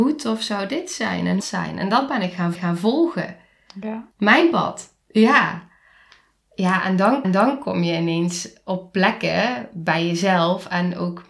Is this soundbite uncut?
no; 5 cuts; at 1.4 s, 2.5 s, 4.1 s, 5.0 s, 7.2 s

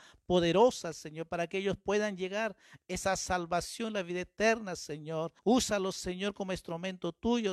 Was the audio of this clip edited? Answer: yes; 1 cut; at 5.4 s

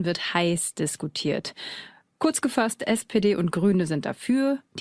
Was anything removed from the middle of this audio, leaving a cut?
no; 0 cuts

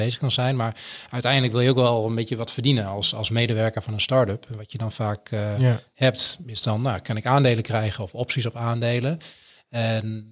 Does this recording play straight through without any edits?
yes; 0 cuts

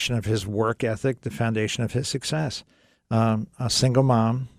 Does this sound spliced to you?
no; 0 cuts

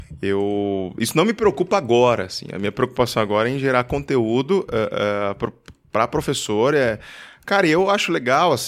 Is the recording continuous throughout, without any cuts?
yes; 0 cuts

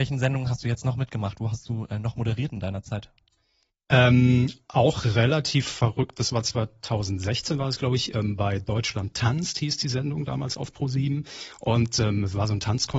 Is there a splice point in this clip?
no; 0 cuts

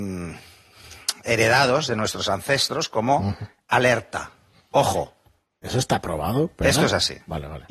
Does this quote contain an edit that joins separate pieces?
no; 0 cuts

